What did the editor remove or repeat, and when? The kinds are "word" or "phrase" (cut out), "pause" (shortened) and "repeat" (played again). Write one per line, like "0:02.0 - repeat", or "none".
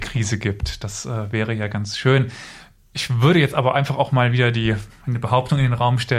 none